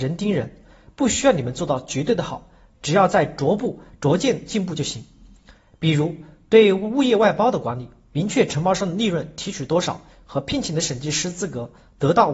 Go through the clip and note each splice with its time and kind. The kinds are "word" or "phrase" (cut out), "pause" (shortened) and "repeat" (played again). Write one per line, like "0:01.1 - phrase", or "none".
none

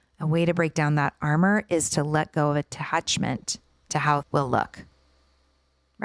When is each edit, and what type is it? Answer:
0:04.2 - word

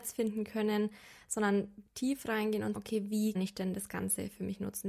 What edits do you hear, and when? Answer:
0:01.9 - word
0:02.7 - word
0:03.3 - word

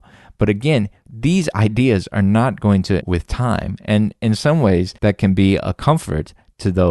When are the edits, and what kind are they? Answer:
0:03.0 - word
0:05.0 - pause

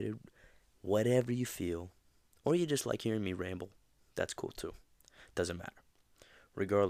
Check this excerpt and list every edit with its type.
none

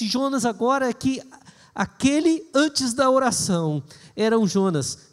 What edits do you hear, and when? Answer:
none

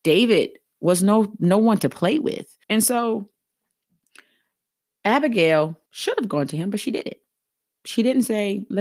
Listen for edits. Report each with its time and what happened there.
0:02.6 - pause
0:05.9 - pause

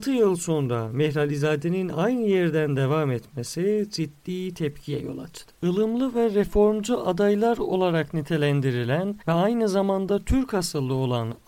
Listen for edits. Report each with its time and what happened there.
0:09.2 - pause

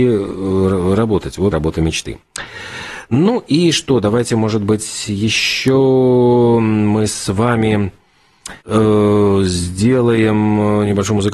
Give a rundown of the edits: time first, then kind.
0:01.5 - word
0:08.6 - pause

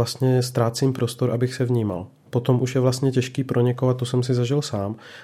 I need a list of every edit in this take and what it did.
none

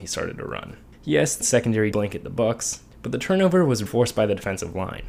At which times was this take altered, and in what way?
0:00.9 - pause
0:01.4 - word
0:01.9 - word
0:02.9 - pause
0:03.9 - word

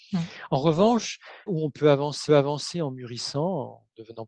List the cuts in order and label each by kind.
0:01.5 - word
0:02.3 - repeat

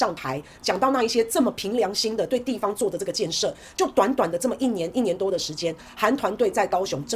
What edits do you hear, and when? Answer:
none

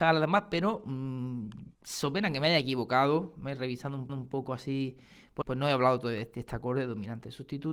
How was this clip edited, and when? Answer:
0:01.7 - pause
0:04.1 - repeat
0:05.4 - phrase

